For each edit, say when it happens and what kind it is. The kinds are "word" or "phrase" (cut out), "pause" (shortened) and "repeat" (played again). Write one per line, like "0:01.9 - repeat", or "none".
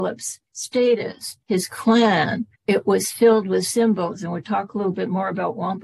0:01.4 - pause
0:02.6 - pause